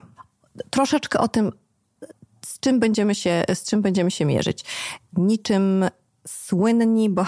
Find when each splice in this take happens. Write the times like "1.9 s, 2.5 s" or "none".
none